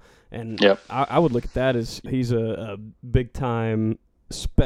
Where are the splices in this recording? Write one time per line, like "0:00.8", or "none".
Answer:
0:02.1